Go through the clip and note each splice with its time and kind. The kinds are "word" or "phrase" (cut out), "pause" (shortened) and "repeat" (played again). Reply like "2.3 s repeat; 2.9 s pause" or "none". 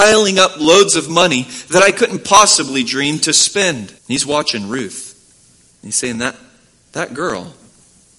4.0 s pause